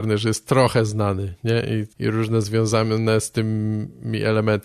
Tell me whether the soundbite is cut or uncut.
cut